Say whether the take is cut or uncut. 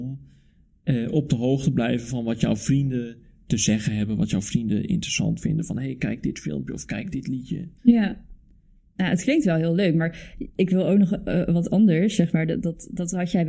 cut